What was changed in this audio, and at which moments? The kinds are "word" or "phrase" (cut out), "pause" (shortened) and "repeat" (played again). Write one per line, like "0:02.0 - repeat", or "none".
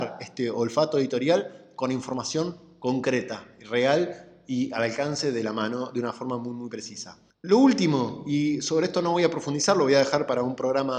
none